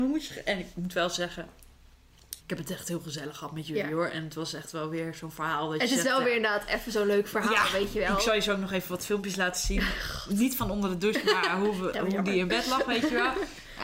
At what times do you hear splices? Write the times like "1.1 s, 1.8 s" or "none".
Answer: 2.4 s